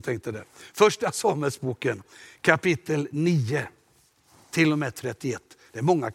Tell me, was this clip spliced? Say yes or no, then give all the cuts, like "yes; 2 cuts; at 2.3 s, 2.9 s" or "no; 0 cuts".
no; 0 cuts